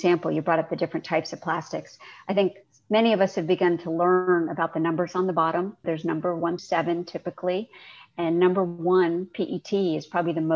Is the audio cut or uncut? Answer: cut